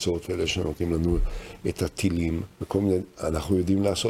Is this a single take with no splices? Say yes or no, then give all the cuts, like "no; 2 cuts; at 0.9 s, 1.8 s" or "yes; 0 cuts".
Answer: no; 1 cut; at 2.5 s